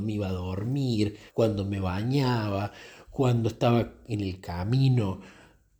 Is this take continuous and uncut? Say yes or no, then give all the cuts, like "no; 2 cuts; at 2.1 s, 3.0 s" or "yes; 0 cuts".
no; 1 cut; at 1.3 s